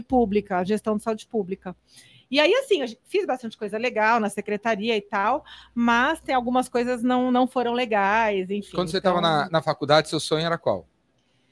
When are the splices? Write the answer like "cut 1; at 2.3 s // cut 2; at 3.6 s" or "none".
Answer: none